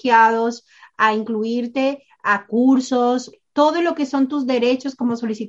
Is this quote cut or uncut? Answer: uncut